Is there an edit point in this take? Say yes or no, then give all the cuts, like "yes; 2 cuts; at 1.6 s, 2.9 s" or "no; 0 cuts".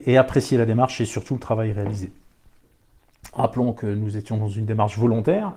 no; 0 cuts